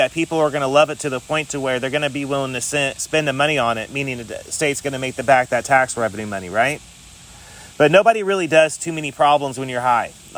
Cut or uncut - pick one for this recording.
cut